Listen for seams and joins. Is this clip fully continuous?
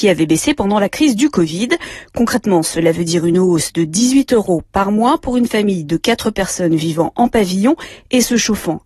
yes; 0 cuts

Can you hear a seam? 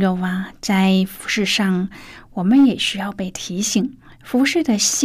yes; 1 cut; at 4.0 s

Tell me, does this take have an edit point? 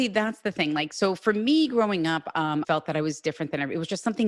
yes; 1 cut; at 2.6 s

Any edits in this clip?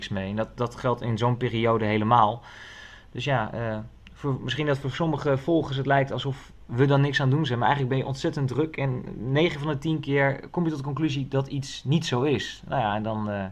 no; 0 cuts

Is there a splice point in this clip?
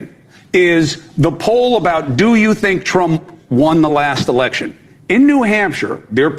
no; 0 cuts

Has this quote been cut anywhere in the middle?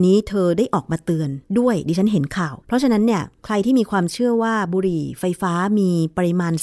yes; 1 cut; at 2.6 s

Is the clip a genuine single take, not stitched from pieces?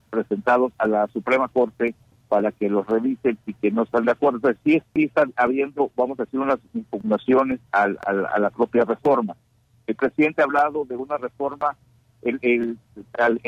yes; 0 cuts

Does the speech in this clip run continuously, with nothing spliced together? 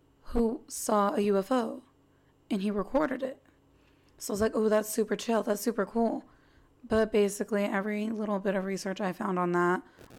yes; 0 cuts

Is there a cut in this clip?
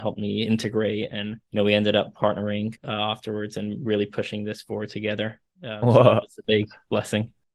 yes; 2 cuts; at 1.4 s, 2.8 s

